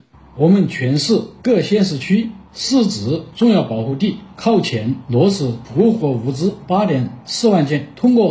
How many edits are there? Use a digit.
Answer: 0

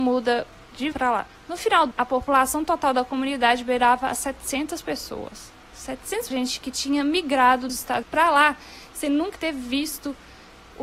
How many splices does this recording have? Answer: 6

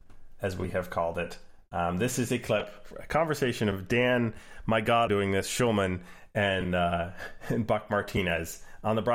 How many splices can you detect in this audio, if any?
1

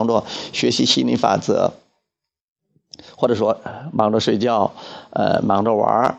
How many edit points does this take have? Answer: 0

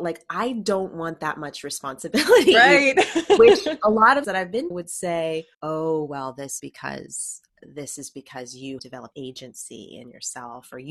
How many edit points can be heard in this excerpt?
7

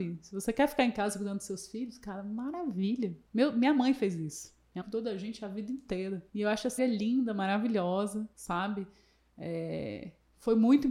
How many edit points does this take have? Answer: 5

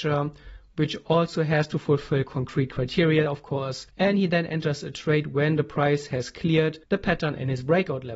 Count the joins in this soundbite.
2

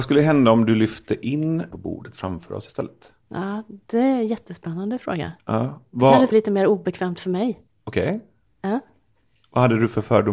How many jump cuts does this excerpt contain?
4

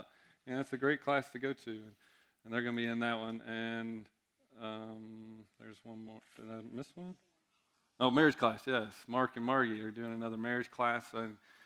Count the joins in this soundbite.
0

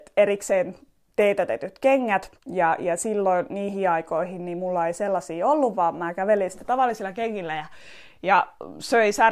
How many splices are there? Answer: 1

